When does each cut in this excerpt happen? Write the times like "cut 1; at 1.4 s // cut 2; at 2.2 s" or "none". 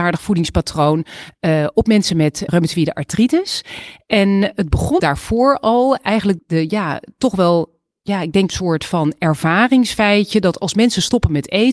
cut 1; at 2.5 s // cut 2; at 5.0 s // cut 3; at 6.4 s // cut 4; at 8.5 s